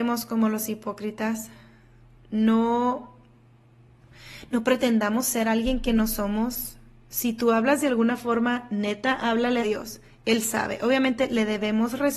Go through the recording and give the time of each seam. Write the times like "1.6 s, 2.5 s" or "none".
9.6 s